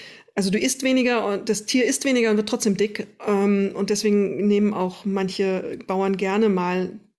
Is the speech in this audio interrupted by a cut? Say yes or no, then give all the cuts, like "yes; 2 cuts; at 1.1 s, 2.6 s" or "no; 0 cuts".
no; 0 cuts